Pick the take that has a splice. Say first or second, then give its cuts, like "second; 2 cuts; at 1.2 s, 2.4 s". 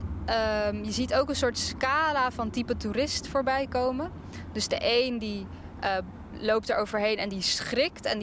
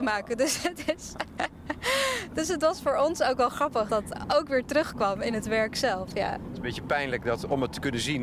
second; 1 cut; at 3.9 s